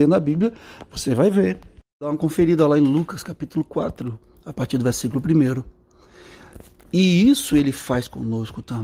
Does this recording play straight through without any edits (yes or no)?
yes